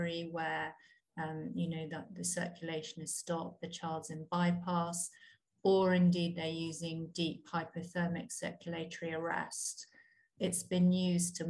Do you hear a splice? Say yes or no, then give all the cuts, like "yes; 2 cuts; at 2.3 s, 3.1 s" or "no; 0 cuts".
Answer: yes; 1 cut; at 10.4 s